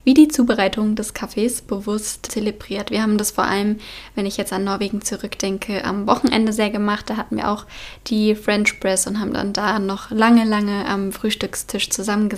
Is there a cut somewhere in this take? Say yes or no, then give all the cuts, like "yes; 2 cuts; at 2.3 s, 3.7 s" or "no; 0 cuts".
yes; 1 cut; at 2.3 s